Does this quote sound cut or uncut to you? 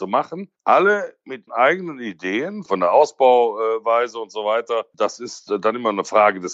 cut